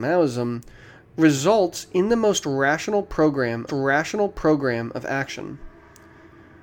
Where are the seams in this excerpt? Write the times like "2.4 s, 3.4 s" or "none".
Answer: 3.7 s